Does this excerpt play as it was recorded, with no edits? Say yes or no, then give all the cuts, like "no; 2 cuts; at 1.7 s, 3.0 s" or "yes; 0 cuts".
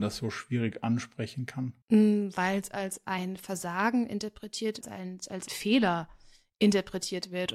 no; 3 cuts; at 1.8 s, 4.8 s, 5.5 s